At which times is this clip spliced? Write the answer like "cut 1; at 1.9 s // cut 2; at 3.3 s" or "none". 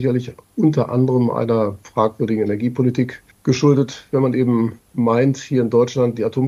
cut 1; at 3.3 s